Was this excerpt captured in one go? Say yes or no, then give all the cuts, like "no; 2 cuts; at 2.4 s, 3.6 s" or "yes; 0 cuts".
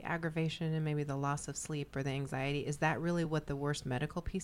yes; 0 cuts